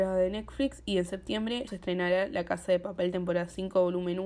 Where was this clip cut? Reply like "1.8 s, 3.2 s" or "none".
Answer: 1.7 s